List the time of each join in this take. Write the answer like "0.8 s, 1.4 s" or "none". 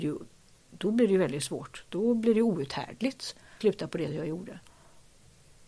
3.6 s, 4.1 s